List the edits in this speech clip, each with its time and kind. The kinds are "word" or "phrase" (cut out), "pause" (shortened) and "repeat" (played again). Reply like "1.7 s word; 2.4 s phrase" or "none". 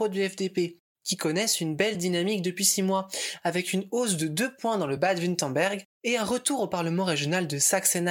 none